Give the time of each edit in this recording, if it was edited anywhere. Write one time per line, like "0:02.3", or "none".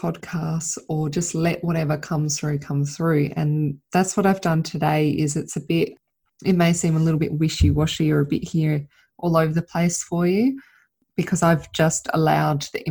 none